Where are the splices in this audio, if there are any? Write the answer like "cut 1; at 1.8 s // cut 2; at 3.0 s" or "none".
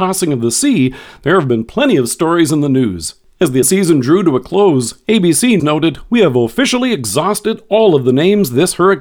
cut 1; at 3.6 s // cut 2; at 5.6 s

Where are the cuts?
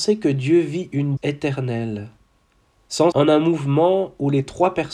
cut 1; at 1.2 s // cut 2; at 3.1 s

